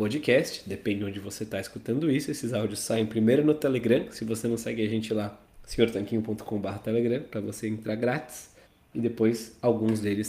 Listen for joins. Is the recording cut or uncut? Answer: cut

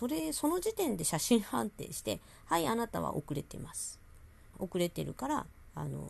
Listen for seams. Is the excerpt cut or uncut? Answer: cut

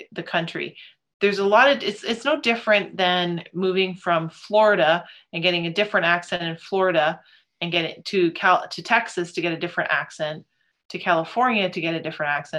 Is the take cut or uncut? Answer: uncut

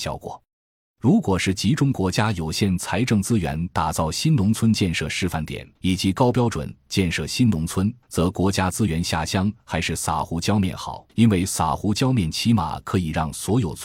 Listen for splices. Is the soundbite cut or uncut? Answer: cut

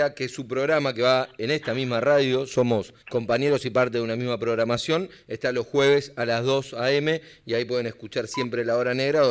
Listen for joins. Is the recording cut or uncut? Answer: cut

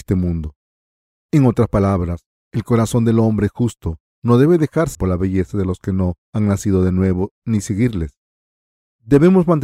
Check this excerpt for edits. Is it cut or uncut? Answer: cut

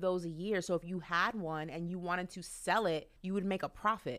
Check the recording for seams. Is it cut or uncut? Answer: cut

